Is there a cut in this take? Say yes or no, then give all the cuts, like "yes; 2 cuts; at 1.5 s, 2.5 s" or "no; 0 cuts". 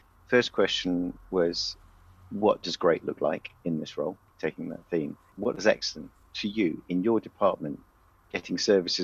no; 0 cuts